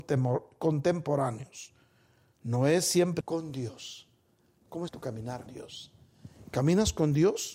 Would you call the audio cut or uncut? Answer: cut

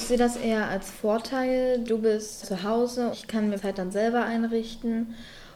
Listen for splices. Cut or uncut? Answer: cut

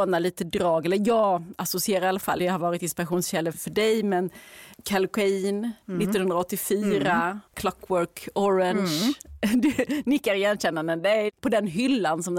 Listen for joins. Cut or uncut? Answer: cut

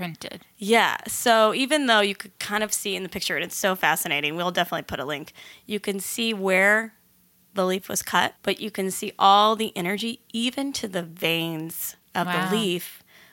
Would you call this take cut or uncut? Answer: cut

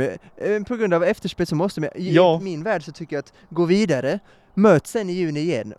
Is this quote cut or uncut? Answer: uncut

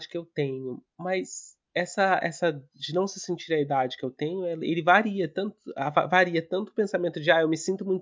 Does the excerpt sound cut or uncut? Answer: cut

